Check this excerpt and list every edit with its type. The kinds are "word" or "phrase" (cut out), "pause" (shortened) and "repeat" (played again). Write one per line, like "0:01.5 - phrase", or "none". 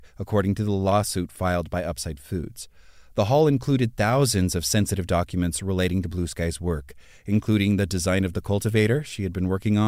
none